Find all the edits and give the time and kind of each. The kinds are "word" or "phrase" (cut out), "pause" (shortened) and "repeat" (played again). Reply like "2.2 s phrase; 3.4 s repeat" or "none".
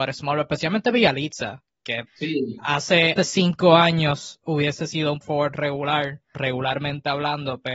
2.1 s word; 3.2 s word; 4.4 s word; 5.2 s word; 6.3 s word